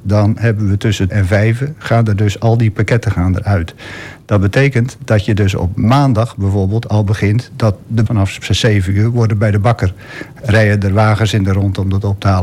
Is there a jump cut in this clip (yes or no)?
yes